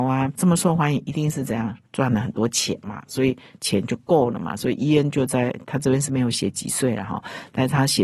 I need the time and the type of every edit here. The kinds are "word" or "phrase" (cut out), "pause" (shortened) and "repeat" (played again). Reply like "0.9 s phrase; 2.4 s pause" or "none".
1.8 s pause